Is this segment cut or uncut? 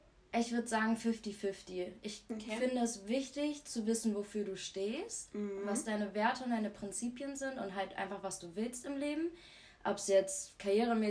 uncut